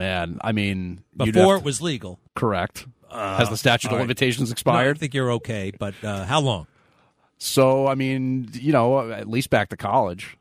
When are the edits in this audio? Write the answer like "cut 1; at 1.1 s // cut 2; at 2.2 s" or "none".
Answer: cut 1; at 2.3 s